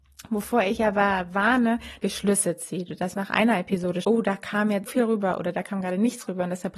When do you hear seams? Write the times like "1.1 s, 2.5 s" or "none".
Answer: 2.0 s, 3.1 s, 4.0 s, 4.9 s